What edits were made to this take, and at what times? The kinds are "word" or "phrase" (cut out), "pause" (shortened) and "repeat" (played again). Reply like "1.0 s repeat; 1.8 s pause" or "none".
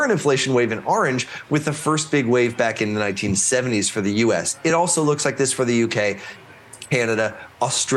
none